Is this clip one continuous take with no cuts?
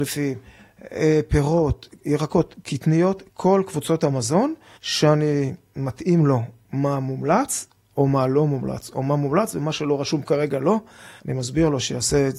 no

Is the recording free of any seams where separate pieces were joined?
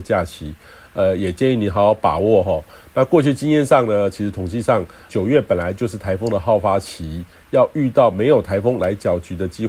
no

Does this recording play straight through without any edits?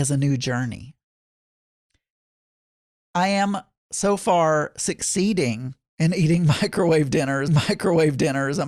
no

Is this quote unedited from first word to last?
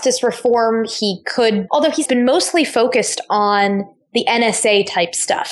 no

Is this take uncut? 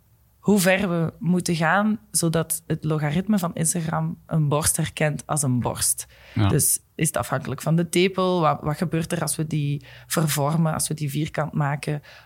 yes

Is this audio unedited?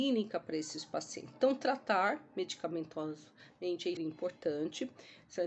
no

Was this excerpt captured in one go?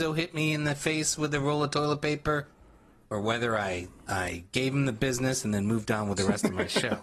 no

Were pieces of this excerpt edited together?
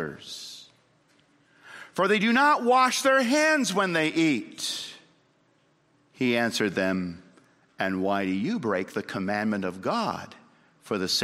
no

